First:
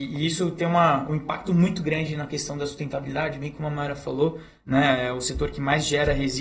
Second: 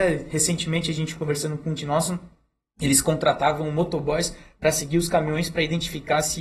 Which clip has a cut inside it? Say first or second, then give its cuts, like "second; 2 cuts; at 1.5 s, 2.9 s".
second; 1 cut; at 1.8 s